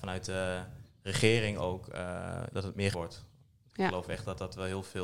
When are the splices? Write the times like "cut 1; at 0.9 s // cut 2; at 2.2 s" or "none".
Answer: cut 1; at 2.5 s // cut 2; at 2.9 s